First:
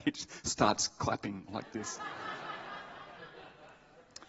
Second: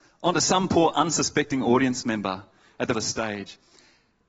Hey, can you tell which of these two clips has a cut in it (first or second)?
second